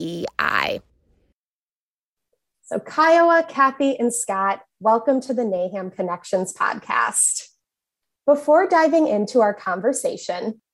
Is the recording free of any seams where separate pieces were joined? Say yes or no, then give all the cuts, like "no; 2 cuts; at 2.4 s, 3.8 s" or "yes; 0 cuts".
yes; 0 cuts